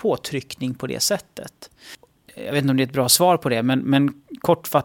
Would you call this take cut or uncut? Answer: uncut